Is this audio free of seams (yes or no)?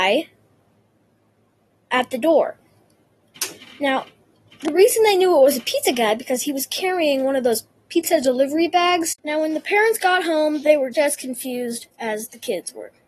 no